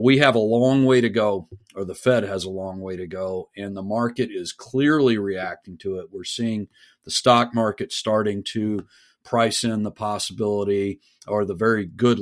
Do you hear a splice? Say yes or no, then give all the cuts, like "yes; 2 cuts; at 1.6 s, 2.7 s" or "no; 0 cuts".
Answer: no; 0 cuts